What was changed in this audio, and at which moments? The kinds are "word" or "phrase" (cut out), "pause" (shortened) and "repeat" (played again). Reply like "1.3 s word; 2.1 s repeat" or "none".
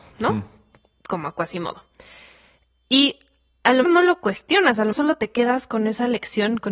3.8 s word; 4.9 s word